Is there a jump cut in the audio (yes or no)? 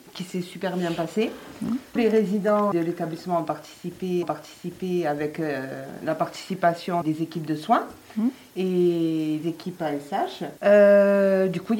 yes